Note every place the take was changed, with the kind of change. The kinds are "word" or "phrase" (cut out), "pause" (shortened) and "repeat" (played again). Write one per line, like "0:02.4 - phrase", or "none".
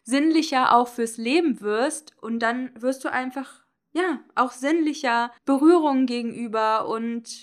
0:05.4 - pause